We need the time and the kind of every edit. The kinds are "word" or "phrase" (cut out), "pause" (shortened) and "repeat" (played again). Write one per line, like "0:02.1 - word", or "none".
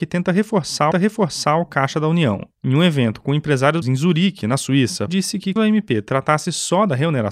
0:00.9 - repeat
0:03.8 - word
0:05.1 - word
0:05.6 - word